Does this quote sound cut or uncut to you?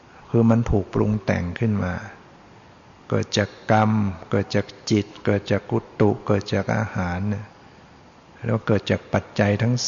uncut